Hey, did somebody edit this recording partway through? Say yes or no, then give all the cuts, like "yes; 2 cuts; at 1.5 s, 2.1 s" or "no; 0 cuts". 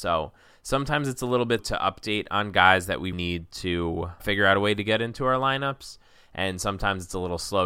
yes; 3 cuts; at 1.6 s, 3.1 s, 4.2 s